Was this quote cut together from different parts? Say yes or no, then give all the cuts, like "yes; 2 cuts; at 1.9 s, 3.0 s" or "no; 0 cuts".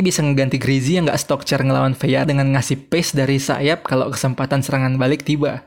yes; 1 cut; at 2.2 s